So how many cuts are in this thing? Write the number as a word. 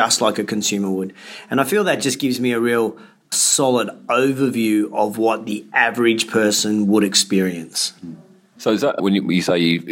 zero